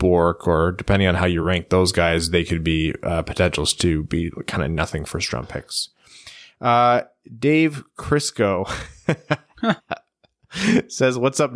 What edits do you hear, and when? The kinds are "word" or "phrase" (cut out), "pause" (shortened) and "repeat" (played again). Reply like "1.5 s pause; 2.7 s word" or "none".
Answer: none